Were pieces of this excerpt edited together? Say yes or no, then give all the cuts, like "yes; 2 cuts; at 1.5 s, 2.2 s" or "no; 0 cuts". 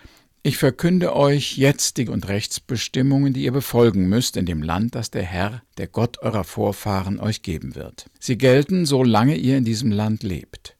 yes; 3 cuts; at 2.1 s, 5.7 s, 8.1 s